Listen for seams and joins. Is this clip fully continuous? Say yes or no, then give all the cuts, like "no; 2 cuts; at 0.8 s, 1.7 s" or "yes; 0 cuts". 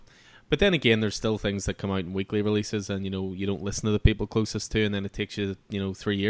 yes; 0 cuts